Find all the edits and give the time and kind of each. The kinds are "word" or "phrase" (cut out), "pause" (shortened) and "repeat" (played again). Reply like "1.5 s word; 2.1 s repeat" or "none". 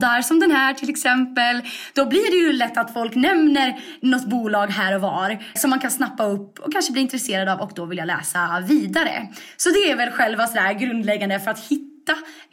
5.6 s word